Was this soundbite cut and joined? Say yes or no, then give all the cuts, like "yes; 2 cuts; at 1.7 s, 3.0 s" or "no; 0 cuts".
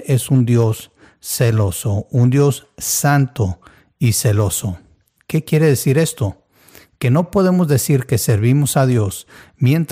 no; 0 cuts